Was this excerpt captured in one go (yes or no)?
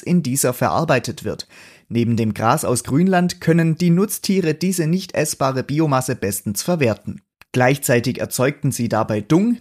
yes